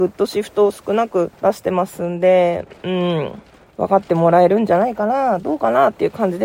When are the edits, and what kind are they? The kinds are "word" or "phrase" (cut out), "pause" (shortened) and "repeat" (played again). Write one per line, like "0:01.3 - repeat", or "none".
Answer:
0:01.3 - pause
0:03.5 - pause